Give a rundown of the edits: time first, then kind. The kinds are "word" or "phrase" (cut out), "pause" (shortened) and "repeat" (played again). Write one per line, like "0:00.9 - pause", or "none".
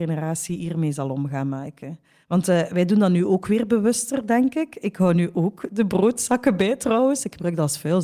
none